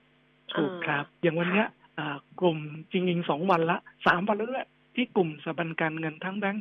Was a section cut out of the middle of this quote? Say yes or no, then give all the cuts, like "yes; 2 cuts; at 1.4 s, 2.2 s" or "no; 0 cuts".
no; 0 cuts